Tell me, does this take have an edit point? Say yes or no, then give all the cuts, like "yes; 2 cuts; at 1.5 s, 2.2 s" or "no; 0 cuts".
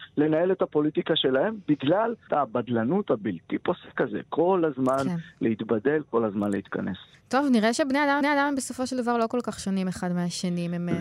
yes; 3 cuts; at 2.3 s, 7.1 s, 8.2 s